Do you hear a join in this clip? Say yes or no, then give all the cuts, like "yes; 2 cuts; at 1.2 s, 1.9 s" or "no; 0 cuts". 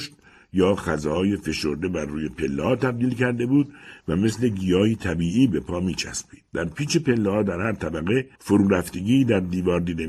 yes; 2 cuts; at 6.5 s, 8.3 s